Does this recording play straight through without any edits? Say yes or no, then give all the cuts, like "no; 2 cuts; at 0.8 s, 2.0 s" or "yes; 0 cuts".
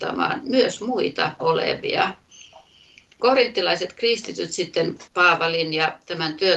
no; 3 cuts; at 1.4 s, 3.2 s, 5.1 s